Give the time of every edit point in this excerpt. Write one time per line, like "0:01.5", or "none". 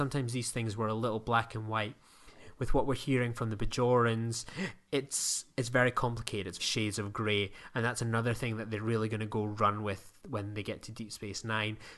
0:06.6